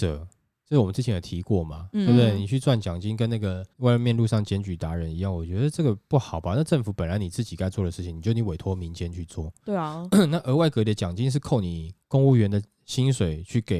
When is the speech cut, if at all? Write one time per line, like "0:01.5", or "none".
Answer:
0:03.7
0:12.0